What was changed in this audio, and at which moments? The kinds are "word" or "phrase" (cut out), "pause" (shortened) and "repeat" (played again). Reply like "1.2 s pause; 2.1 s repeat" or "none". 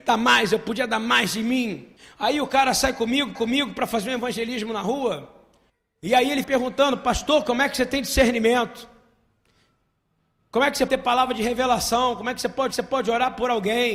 2.0 s pause; 3.3 s repeat; 5.7 s pause; 6.4 s word; 10.9 s word; 12.7 s repeat